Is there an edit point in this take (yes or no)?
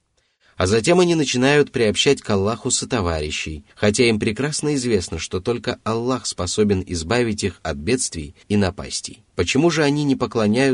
yes